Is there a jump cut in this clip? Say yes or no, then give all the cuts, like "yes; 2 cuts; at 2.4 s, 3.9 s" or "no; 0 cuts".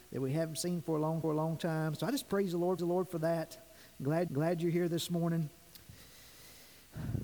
yes; 3 cuts; at 1.2 s, 2.8 s, 4.3 s